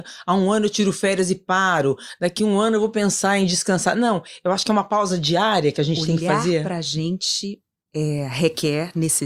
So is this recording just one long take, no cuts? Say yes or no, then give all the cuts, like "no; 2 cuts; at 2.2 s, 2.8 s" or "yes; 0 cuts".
yes; 0 cuts